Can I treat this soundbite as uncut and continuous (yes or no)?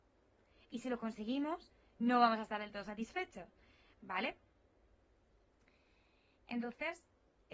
yes